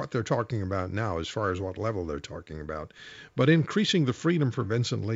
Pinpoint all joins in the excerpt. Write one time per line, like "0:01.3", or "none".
none